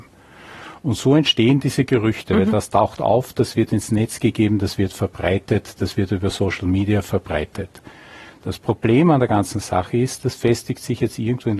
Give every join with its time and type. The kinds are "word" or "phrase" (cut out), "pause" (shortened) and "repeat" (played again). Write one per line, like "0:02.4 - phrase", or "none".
none